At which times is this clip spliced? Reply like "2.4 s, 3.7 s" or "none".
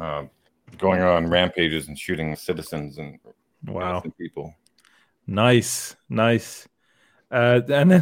2.3 s